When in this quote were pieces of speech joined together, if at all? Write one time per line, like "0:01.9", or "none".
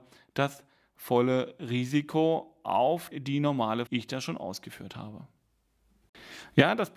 0:03.1
0:03.9